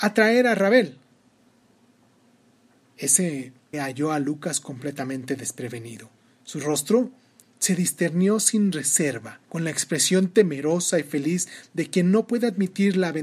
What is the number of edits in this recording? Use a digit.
3